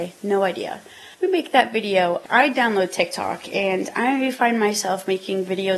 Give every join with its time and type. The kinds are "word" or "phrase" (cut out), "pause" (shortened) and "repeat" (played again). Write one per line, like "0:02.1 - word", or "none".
0:01.1 - pause